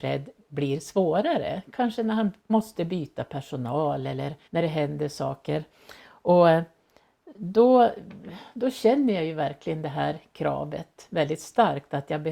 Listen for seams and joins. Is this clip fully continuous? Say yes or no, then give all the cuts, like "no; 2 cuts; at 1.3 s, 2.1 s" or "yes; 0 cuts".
no; 2 cuts; at 2.4 s, 4.4 s